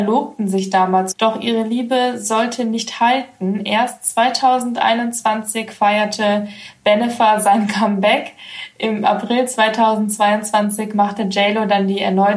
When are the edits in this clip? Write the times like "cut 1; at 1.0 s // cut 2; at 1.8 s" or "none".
cut 1; at 1.1 s